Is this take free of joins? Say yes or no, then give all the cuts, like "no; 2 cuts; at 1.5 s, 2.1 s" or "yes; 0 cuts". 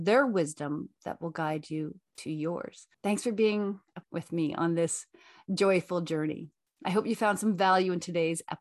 no; 2 cuts; at 2.9 s, 4.0 s